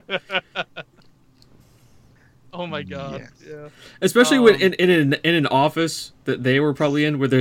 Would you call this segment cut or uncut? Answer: uncut